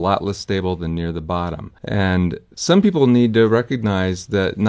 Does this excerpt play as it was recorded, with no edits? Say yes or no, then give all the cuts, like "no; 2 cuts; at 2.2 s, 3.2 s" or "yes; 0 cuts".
no; 1 cut; at 1.8 s